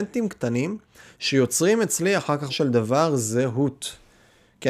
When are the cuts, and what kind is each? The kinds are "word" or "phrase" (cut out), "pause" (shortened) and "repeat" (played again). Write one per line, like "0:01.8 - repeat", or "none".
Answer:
0:02.5 - word